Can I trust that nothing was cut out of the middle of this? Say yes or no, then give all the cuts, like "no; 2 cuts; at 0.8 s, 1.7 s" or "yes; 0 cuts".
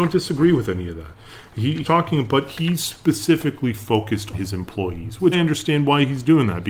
no; 3 cuts; at 1.8 s, 4.3 s, 5.3 s